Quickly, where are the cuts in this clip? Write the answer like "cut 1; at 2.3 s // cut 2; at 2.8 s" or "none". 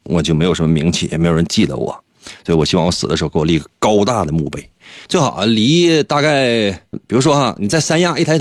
cut 1; at 5.0 s // cut 2; at 6.9 s

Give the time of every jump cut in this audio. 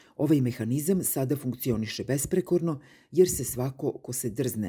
none

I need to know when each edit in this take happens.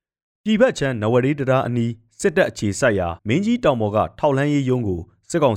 cut 1; at 3.2 s

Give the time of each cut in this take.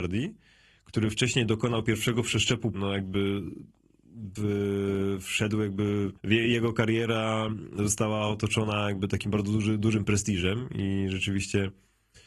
cut 1; at 2.7 s // cut 2; at 4.4 s // cut 3; at 6.2 s

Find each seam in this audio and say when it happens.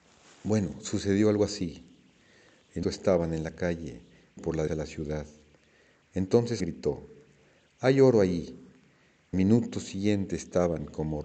cut 1; at 2.8 s // cut 2; at 4.4 s // cut 3; at 4.7 s // cut 4; at 6.6 s // cut 5; at 9.3 s

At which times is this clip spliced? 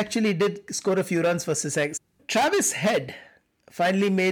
none

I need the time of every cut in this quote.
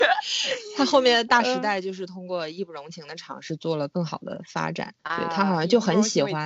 cut 1; at 5.0 s

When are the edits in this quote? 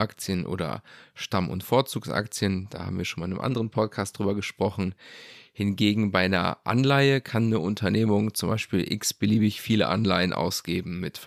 none

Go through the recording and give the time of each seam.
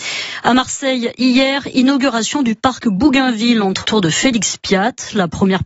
cut 1; at 3.8 s

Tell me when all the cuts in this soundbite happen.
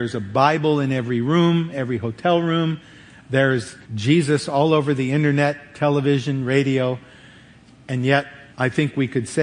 cut 1; at 1.7 s // cut 2; at 3.8 s // cut 3; at 8.5 s

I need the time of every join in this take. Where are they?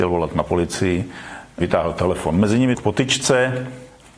cut 1; at 2.7 s

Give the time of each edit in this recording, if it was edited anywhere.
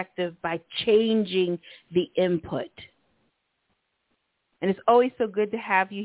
none

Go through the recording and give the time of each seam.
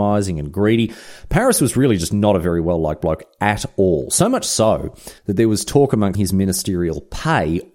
cut 1; at 5.2 s // cut 2; at 6.1 s

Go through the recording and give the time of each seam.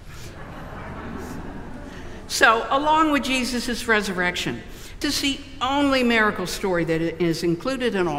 cut 1; at 5.0 s

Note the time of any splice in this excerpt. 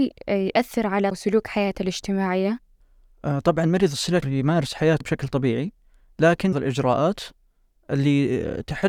cut 1; at 1.1 s // cut 2; at 2.8 s // cut 3; at 4.2 s // cut 4; at 5.0 s // cut 5; at 6.5 s

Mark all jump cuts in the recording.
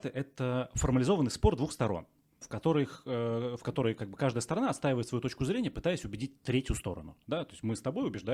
cut 1; at 2.4 s

